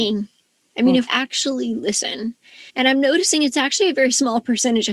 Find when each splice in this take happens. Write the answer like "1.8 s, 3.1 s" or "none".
1.1 s, 2.7 s